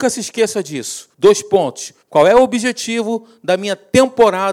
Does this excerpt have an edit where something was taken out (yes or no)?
yes